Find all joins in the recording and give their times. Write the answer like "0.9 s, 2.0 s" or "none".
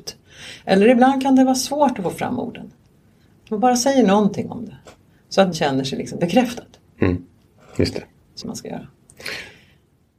5.5 s, 8.4 s